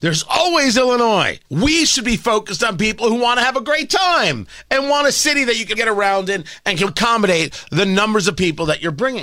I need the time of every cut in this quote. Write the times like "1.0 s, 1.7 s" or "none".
1.4 s, 5.7 s, 6.9 s